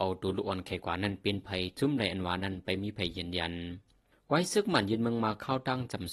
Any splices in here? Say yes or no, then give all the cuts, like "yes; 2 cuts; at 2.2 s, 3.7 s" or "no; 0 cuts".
no; 0 cuts